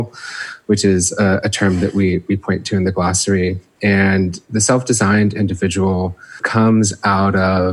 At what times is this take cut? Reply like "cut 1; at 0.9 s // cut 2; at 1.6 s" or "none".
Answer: none

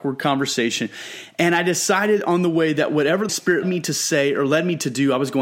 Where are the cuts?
cut 1; at 3.3 s // cut 2; at 3.6 s

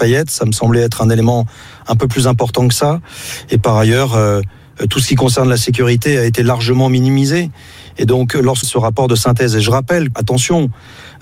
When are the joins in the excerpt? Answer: cut 1; at 8.6 s // cut 2; at 10.1 s

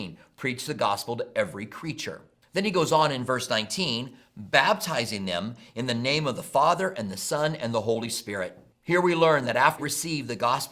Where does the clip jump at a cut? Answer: cut 1; at 9.8 s

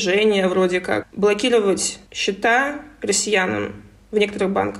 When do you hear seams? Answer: cut 1; at 1.0 s // cut 2; at 2.1 s

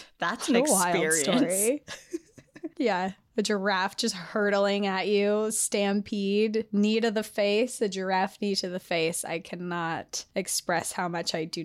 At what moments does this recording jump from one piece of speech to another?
none

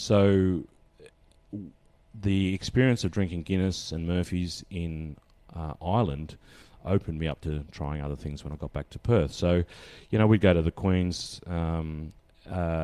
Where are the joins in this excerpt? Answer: none

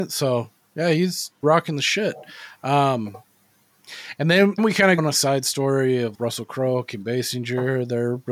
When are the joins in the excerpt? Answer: cut 1; at 1.4 s // cut 2; at 4.6 s // cut 3; at 5.0 s // cut 4; at 6.1 s

